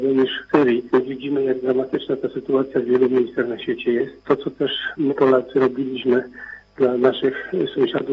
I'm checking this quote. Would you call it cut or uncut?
cut